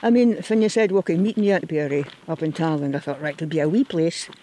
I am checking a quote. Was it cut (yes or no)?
yes